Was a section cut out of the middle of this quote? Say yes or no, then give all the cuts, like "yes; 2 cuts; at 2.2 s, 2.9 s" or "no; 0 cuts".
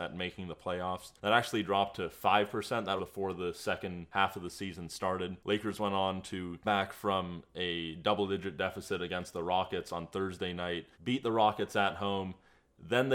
yes; 4 cuts; at 1.2 s, 3.0 s, 6.6 s, 10.9 s